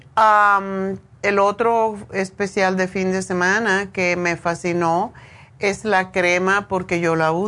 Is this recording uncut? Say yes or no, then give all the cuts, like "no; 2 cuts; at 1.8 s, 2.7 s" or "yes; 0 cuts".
yes; 0 cuts